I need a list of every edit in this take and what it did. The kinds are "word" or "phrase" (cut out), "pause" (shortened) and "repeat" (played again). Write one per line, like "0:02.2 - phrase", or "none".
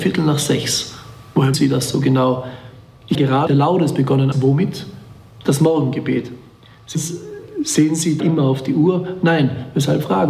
0:01.5 - word
0:03.1 - word
0:03.5 - word
0:04.3 - word
0:06.9 - word
0:08.2 - word

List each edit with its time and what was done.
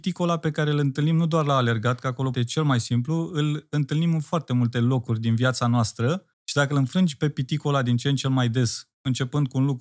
0:02.3 - word
0:06.3 - pause

